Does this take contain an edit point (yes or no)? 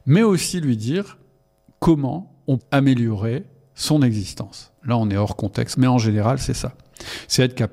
yes